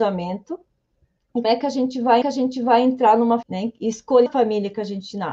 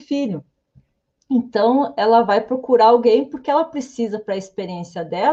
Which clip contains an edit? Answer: first; 4 cuts; at 1.4 s, 2.2 s, 3.4 s, 4.3 s

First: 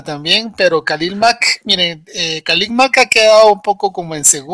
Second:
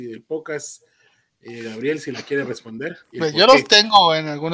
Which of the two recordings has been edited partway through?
second; 1 cut; at 3.0 s

